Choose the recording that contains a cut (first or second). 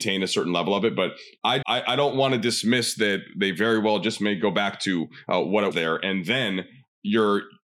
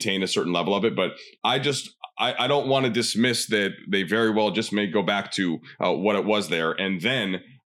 first